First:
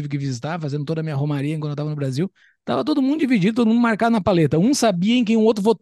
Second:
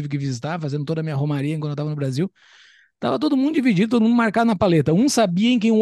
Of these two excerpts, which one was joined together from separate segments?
first; 1 cut; at 2.4 s

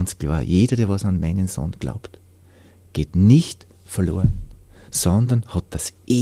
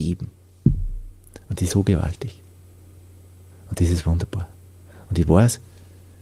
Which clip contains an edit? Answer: second; 1 cut; at 1.7 s

